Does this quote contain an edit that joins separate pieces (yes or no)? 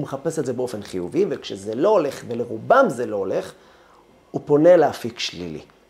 no